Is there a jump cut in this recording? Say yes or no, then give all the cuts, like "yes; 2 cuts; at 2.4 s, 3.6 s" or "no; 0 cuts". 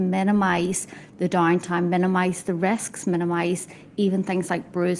no; 0 cuts